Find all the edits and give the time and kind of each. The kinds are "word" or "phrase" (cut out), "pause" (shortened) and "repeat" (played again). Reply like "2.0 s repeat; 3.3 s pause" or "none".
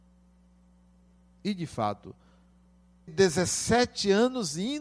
3.1 s word